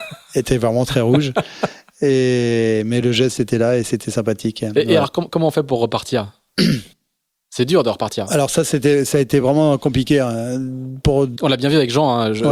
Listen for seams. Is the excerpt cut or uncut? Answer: uncut